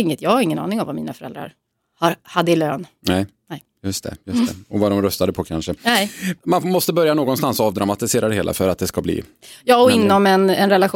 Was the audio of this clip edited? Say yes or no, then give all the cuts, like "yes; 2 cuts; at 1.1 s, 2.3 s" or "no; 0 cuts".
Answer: no; 0 cuts